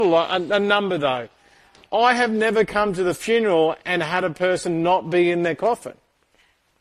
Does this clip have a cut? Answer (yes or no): no